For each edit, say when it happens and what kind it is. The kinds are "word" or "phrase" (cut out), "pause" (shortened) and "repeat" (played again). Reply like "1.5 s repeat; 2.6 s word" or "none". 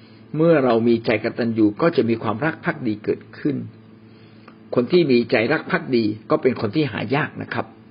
6.3 s pause